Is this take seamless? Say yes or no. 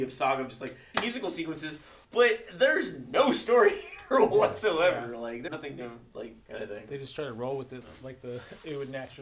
no